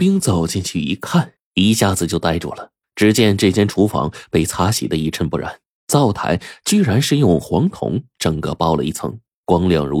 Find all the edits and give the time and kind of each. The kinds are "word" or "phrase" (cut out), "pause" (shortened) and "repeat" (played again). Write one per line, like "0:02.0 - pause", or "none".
0:01.4 - pause
0:02.8 - pause